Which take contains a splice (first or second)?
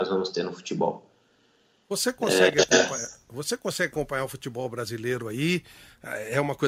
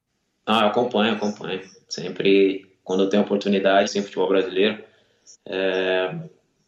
second